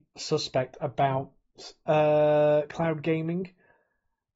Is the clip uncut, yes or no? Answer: yes